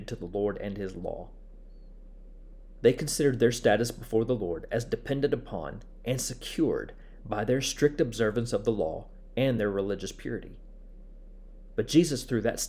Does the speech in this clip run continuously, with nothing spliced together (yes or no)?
yes